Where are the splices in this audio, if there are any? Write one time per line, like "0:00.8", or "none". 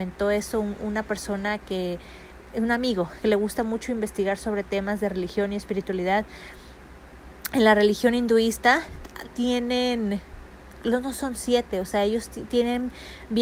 0:09.2